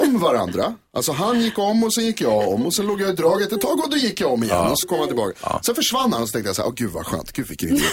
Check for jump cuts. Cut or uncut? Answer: cut